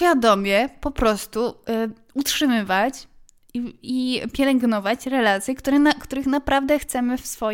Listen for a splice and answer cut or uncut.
uncut